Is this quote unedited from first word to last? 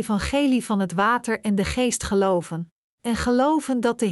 yes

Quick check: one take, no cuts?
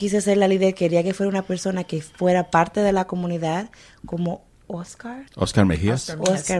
no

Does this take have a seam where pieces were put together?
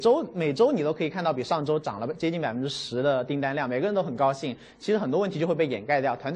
no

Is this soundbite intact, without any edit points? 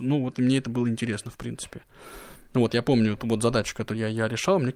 yes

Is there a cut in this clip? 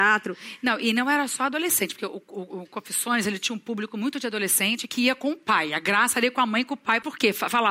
no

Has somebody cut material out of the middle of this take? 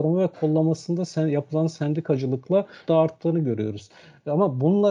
yes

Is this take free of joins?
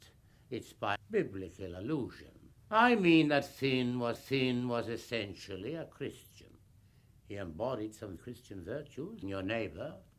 no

